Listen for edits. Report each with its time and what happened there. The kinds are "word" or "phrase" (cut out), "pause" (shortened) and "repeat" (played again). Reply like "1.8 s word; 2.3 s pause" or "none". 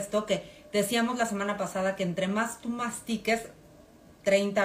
none